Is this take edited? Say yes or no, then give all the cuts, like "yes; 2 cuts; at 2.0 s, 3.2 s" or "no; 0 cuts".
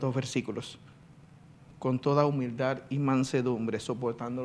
no; 0 cuts